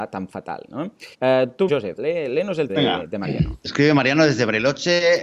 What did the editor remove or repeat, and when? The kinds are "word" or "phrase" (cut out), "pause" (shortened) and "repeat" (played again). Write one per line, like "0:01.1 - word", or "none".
0:01.1 - pause
0:01.7 - word
0:02.0 - word
0:02.7 - word
0:03.7 - phrase